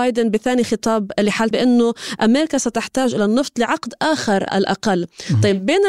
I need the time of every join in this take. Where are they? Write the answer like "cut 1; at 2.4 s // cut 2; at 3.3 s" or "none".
cut 1; at 1.5 s // cut 2; at 4.5 s